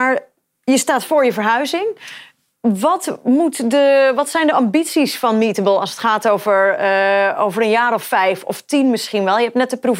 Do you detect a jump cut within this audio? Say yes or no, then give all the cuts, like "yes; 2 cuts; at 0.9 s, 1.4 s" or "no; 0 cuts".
no; 0 cuts